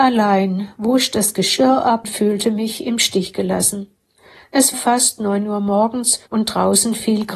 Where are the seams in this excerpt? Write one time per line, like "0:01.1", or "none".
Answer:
0:02.0
0:04.7
0:06.3